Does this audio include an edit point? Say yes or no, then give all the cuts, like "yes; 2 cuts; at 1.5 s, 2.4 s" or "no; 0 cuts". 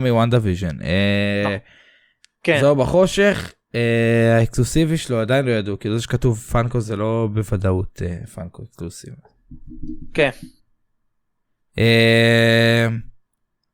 no; 0 cuts